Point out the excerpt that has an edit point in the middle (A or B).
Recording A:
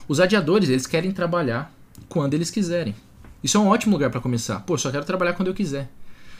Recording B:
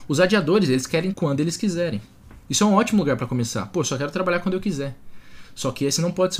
B